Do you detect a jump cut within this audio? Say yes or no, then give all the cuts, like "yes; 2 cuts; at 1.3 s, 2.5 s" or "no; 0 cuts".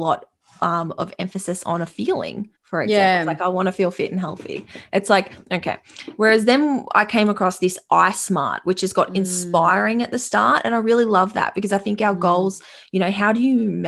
yes; 1 cut; at 2.6 s